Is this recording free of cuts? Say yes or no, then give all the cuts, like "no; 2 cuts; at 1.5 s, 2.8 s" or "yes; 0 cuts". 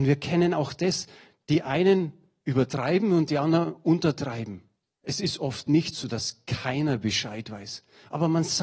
yes; 0 cuts